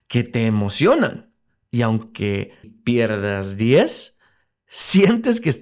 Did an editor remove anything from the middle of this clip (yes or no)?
yes